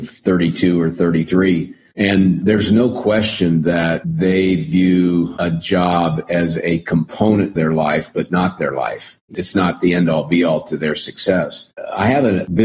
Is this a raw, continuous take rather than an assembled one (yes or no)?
no